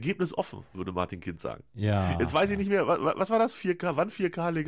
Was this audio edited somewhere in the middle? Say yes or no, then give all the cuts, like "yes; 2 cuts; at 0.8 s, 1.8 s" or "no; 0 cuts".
no; 0 cuts